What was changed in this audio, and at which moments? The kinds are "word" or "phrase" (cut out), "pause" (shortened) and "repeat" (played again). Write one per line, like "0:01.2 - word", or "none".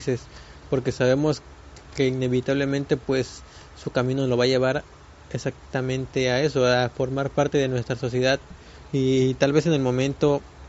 none